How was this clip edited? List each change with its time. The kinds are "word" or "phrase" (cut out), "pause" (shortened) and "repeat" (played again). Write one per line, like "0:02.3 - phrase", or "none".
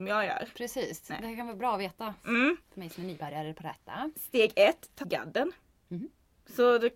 0:05.0 - word